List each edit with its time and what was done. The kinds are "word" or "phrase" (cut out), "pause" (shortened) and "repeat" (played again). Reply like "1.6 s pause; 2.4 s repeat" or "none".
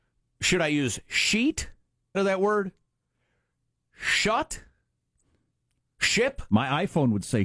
2.1 s word